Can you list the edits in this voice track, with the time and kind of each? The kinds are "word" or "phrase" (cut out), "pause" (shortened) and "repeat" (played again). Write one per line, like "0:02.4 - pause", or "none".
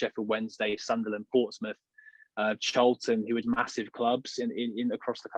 0:03.4 - word